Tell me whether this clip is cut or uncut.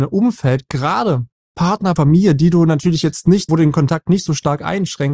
cut